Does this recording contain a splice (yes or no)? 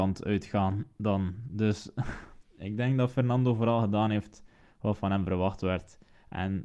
no